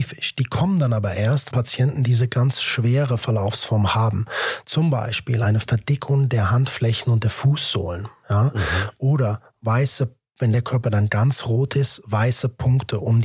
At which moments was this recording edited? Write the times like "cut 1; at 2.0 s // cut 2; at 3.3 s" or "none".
cut 1; at 1.5 s